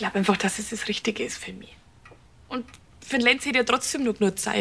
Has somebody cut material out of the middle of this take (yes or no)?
no